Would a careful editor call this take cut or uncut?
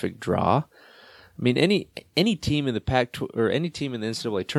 uncut